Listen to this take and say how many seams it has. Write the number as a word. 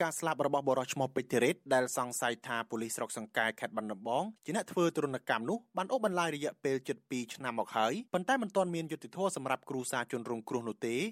two